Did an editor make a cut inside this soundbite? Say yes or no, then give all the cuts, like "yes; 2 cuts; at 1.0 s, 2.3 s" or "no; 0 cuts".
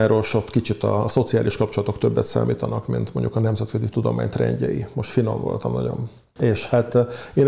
no; 0 cuts